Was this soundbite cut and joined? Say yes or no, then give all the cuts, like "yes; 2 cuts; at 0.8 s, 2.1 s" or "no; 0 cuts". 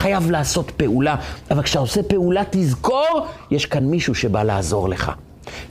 no; 0 cuts